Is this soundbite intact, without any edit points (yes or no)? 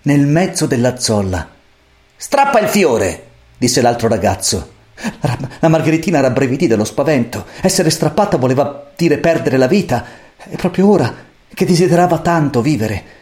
yes